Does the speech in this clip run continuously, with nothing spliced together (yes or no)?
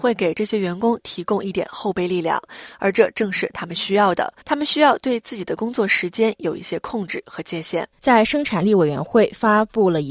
no